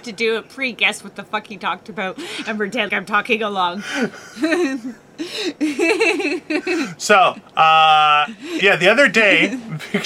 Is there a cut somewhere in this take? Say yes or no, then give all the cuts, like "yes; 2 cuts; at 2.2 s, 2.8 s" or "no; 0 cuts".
yes; 2 cuts; at 2.9 s, 7.5 s